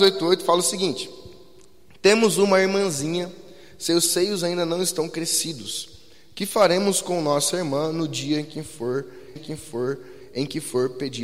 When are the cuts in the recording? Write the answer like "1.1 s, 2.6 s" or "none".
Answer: 9.4 s